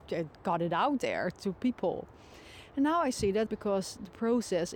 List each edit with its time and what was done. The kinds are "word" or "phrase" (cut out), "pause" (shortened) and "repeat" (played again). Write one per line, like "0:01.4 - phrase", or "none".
0:03.5 - word